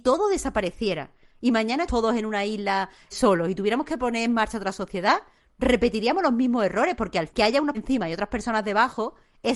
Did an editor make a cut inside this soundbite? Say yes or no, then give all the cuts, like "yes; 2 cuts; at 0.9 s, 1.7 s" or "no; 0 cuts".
yes; 4 cuts; at 1.9 s, 3.1 s, 7.3 s, 7.7 s